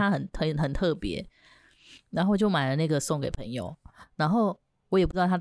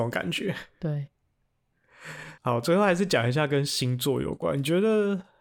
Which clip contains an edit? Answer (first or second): second